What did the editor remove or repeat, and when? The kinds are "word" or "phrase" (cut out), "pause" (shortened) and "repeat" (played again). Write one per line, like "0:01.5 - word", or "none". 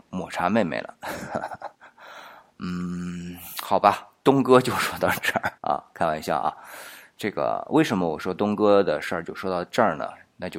0:01.7 - pause
0:05.6 - pause